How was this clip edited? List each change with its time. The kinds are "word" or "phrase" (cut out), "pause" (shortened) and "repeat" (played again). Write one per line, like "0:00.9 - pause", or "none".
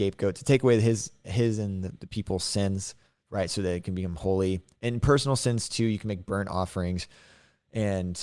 none